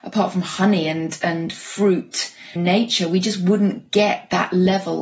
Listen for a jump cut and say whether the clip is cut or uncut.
cut